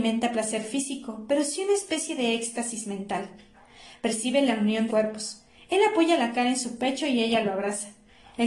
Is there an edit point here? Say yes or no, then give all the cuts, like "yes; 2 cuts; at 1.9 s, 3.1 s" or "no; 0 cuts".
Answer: yes; 1 cut; at 4.9 s